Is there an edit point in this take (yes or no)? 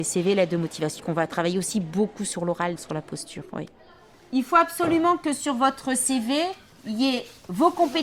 yes